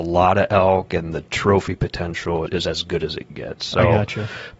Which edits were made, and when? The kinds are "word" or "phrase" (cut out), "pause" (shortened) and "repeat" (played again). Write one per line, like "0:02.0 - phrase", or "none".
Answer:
0:02.5 - word